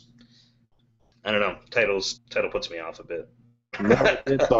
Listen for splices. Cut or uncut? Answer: cut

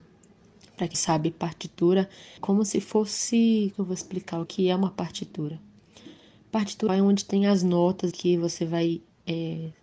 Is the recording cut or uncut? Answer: cut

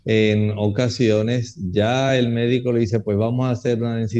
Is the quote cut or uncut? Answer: uncut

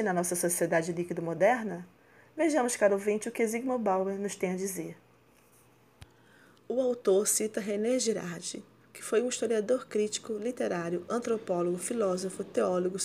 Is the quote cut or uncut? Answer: uncut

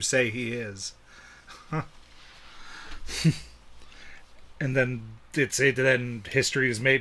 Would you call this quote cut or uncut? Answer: uncut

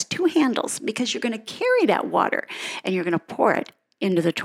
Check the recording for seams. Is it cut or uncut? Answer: uncut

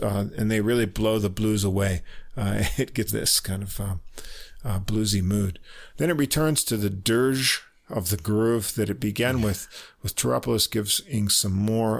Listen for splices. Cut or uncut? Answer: cut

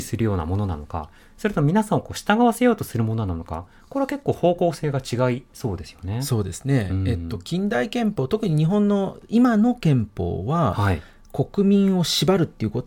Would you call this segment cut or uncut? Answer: uncut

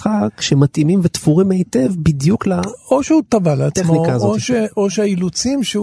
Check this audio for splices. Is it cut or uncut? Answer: uncut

